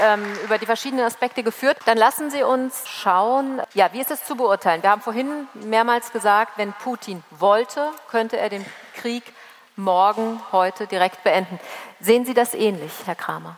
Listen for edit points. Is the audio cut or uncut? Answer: uncut